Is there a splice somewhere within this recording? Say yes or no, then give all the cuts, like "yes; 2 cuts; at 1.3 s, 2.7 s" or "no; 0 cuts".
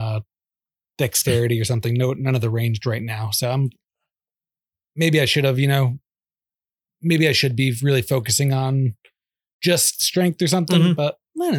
no; 0 cuts